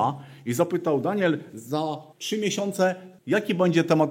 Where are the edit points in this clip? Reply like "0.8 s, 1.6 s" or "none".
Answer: 2.1 s, 3.2 s

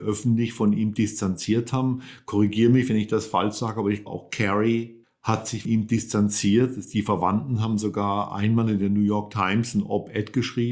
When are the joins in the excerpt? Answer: 4.1 s, 5.0 s, 5.6 s

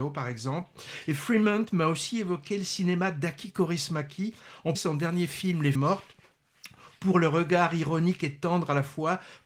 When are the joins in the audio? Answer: 4.7 s, 5.7 s

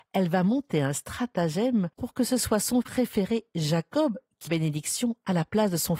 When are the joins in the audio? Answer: 1.9 s, 2.8 s, 4.5 s

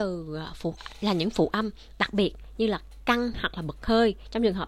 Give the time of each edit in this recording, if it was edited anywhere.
none

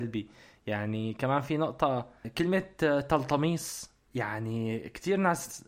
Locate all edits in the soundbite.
4.0 s

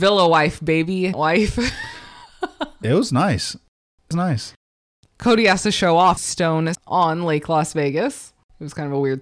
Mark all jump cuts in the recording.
1.1 s, 4.1 s, 6.2 s, 6.7 s

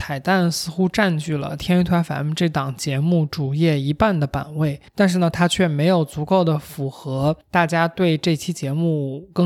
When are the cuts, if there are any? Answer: 4.9 s, 7.4 s

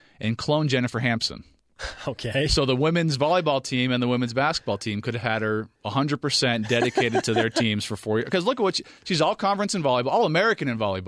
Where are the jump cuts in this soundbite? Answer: 5.7 s

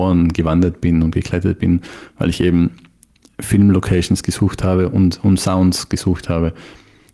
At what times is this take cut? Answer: none

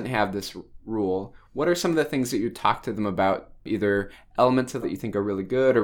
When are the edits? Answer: 4.8 s

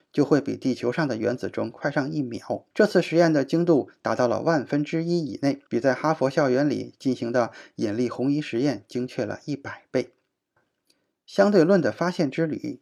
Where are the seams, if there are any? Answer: 2.7 s, 5.7 s

